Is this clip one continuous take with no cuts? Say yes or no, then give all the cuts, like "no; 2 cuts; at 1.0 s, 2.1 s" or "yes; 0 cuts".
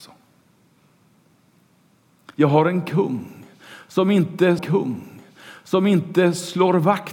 no; 2 cuts; at 2.3 s, 4.6 s